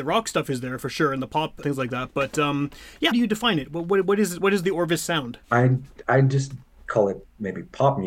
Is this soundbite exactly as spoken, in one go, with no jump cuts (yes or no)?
no